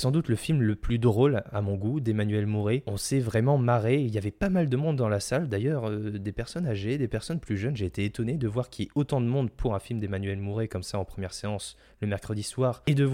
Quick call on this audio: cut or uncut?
uncut